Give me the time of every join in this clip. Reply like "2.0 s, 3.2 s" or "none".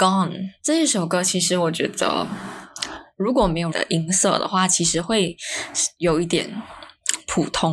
3.7 s